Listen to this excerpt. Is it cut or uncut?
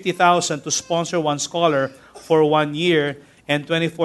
uncut